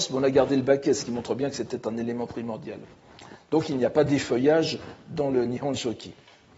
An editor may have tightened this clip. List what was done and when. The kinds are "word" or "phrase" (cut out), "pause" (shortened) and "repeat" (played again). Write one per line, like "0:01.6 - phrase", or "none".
none

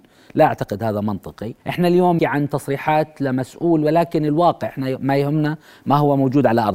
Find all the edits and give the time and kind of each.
0:01.6 - pause
0:02.2 - word

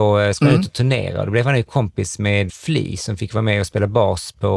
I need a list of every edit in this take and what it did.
0:02.5 - word

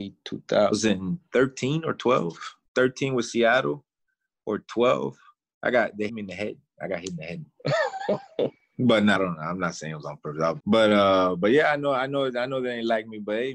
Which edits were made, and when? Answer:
0:02.7 - pause
0:06.1 - word
0:09.2 - word
0:10.6 - word

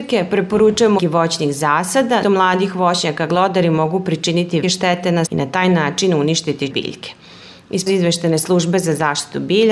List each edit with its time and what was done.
0:01.0 - word
0:02.2 - word
0:03.3 - word
0:04.6 - word
0:05.3 - word
0:06.7 - word
0:07.9 - word

